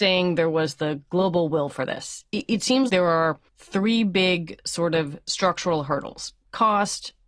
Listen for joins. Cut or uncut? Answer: cut